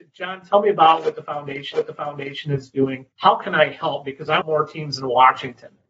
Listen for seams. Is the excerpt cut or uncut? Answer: cut